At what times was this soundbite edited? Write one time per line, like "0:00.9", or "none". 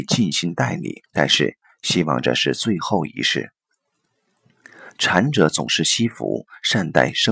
0:01.1